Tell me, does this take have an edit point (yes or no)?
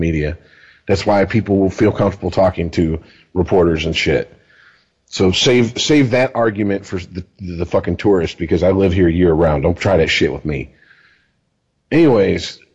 no